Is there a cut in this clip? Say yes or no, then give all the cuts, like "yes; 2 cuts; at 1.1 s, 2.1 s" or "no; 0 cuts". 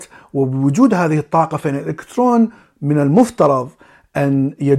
no; 0 cuts